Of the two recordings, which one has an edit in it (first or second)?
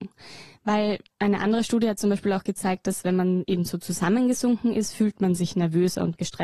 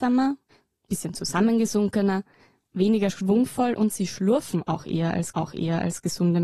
second